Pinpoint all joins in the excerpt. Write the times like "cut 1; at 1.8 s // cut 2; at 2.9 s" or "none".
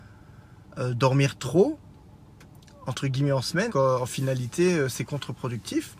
cut 1; at 3.7 s